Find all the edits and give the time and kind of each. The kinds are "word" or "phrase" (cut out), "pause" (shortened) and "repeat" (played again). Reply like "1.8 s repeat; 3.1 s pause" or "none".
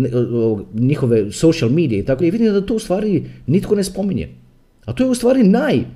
2.2 s word